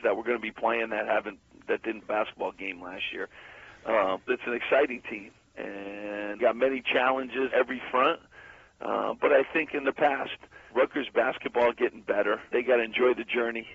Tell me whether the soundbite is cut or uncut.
cut